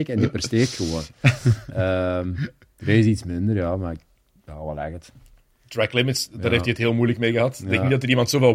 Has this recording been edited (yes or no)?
no